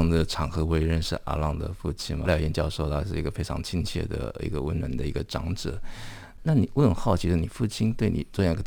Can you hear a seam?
yes; 1 cut; at 2.2 s

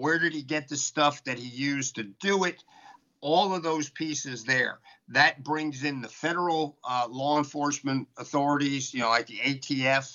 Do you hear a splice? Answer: no; 0 cuts

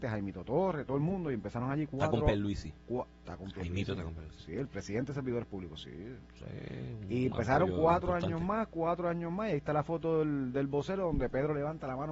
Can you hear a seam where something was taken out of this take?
no; 0 cuts

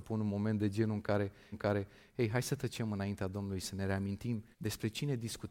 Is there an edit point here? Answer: yes; 2 cuts; at 1.5 s, 4.5 s

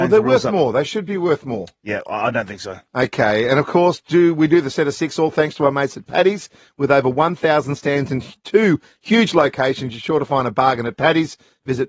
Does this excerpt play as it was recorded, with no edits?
yes; 0 cuts

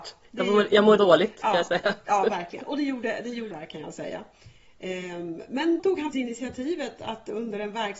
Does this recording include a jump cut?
yes; 4 cuts; at 1.0 s, 3.5 s, 5.8 s, 6.1 s

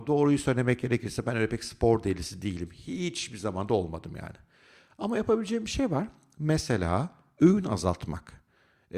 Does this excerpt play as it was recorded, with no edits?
yes; 0 cuts

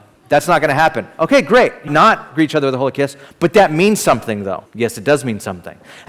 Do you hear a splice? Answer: yes; 2 cuts; at 1.9 s, 4.7 s

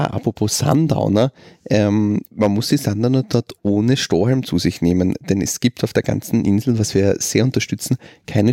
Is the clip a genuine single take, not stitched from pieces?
yes; 0 cuts

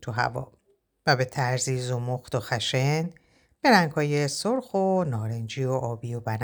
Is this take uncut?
yes; 0 cuts

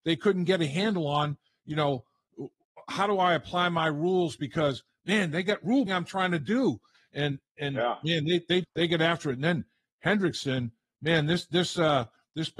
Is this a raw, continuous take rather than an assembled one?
no; 2 cuts; at 5.9 s, 8.6 s

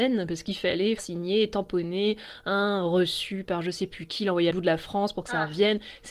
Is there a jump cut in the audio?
yes; 2 cuts; at 1.0 s, 4.5 s

